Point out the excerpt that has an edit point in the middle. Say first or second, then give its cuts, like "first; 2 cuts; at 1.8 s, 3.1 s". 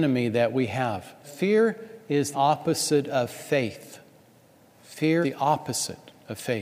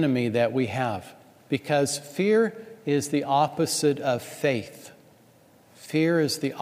first; 3 cuts; at 1.2 s, 2.3 s, 5.2 s